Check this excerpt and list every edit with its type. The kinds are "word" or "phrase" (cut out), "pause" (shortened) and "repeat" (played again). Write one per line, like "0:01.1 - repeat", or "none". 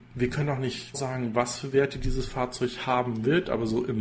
0:00.9 - word